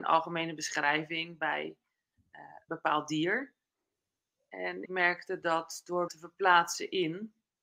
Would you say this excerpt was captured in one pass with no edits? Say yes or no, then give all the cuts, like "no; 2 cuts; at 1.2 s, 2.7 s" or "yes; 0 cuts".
no; 3 cuts; at 2.7 s, 4.9 s, 6.1 s